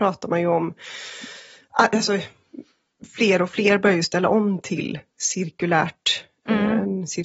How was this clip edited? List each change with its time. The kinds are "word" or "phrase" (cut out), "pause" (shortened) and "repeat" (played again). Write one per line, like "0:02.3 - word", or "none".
none